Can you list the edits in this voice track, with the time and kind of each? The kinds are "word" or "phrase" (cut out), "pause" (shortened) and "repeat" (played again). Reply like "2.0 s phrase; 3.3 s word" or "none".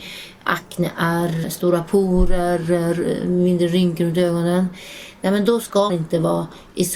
1.4 s word; 5.9 s word